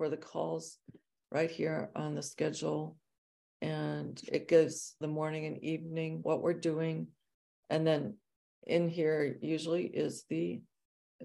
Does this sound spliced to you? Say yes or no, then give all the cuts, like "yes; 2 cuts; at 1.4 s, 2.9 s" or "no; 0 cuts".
no; 0 cuts